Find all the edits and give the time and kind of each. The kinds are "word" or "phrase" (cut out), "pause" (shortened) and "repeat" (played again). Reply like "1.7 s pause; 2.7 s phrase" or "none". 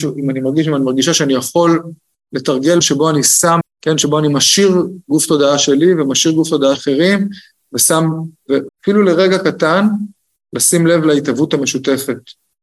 2.8 s word; 3.6 s word; 6.7 s word; 8.7 s word